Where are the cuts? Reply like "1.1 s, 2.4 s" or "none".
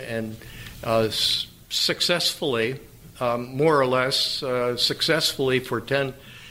none